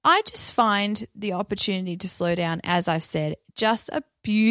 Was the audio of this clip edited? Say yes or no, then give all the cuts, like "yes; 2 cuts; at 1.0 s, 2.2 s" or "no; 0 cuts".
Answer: no; 0 cuts